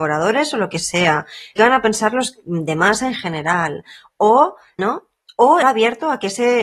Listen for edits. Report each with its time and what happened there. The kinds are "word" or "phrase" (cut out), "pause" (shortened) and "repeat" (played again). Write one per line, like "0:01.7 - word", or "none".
0:01.6 - phrase
0:04.8 - phrase
0:05.6 - word